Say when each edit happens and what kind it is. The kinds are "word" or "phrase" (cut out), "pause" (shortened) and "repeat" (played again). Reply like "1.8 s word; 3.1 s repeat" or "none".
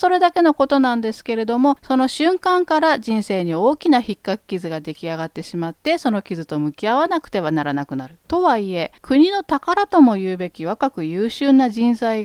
8.2 s pause; 9.0 s pause